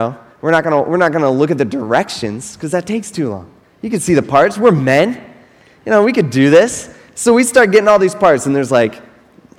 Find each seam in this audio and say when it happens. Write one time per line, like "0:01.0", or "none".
0:03.6

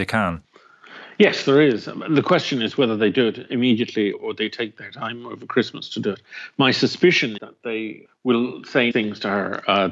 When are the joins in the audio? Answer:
0:04.1
0:07.4
0:08.1
0:08.9

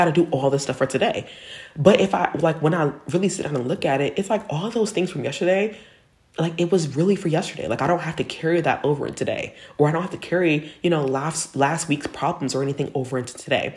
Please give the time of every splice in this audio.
none

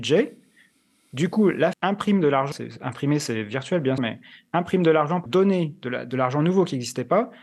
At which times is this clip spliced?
0:01.7
0:02.5
0:04.0
0:05.3

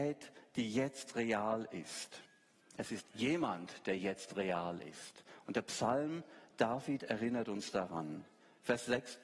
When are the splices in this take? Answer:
none

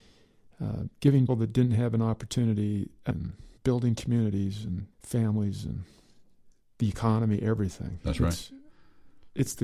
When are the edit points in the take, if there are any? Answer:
0:01.3
0:03.1
0:03.6
0:04.9
0:06.5

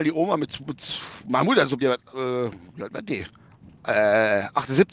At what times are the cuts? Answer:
0:01.8

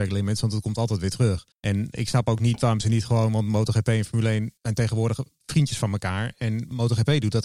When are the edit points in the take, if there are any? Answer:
0:01.5
0:04.6

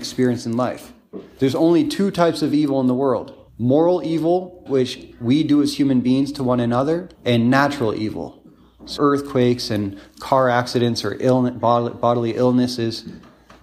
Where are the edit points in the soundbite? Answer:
0:03.5
0:04.7
0:07.1
0:09.0

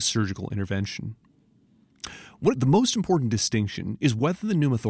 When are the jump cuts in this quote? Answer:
0:02.5

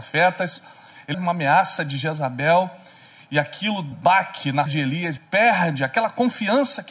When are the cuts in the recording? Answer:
0:01.1
0:03.9
0:04.7
0:05.2

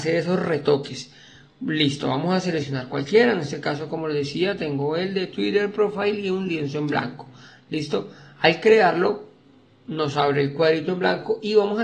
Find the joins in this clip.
none

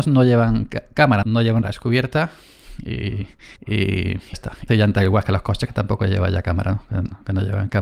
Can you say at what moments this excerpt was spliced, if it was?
0:01.2
0:01.6
0:03.6
0:04.3
0:04.7

